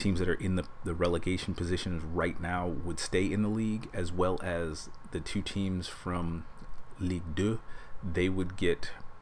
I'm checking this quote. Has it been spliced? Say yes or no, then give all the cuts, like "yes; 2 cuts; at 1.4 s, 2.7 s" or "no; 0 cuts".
no; 0 cuts